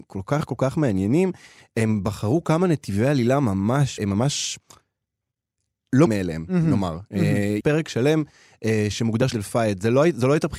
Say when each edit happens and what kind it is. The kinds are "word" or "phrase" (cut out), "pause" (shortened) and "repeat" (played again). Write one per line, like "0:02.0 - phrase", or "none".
0:04.0 - word
0:06.1 - word
0:07.6 - word
0:09.3 - word